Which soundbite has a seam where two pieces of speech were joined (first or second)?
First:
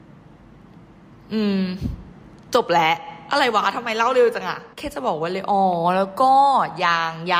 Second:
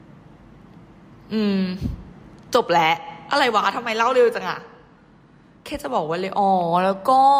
first